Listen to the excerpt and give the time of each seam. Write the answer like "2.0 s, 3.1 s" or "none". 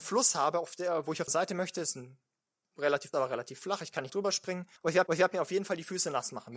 1.3 s, 3.1 s, 4.1 s, 4.8 s, 5.1 s